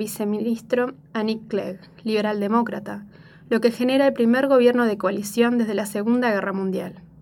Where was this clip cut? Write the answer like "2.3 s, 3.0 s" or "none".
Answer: none